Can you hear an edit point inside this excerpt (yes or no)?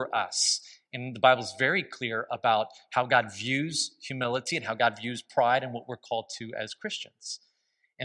no